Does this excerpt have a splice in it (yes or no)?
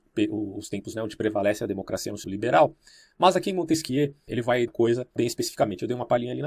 yes